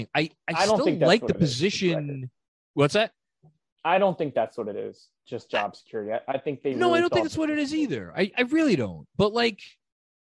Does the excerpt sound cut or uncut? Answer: uncut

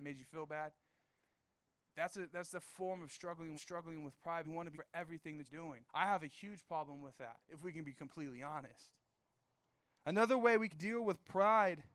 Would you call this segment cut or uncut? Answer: cut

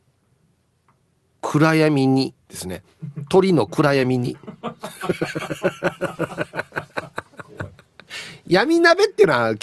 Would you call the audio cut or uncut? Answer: cut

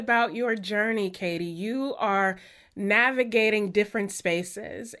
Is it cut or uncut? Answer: uncut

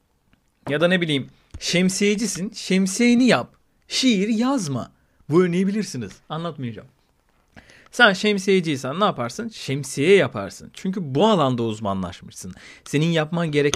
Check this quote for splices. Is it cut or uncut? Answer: uncut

